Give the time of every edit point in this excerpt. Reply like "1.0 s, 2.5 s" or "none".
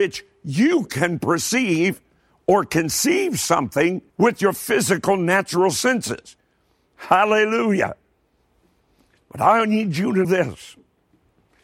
4.1 s, 10.2 s